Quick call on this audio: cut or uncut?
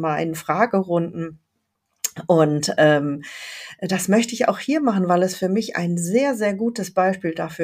uncut